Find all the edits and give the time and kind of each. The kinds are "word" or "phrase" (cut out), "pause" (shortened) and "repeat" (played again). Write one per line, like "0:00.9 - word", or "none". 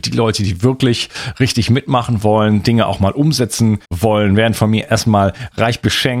0:03.8 - pause